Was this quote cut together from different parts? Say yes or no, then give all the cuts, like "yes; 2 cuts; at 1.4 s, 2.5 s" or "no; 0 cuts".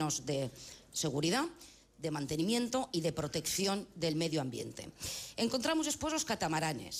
no; 0 cuts